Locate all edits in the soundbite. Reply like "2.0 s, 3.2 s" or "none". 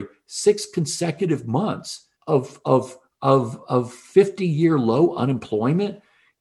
2.2 s